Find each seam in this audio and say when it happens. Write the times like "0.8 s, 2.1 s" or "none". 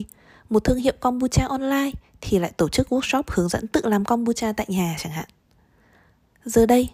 none